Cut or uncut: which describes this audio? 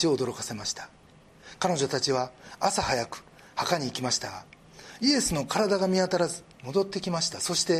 cut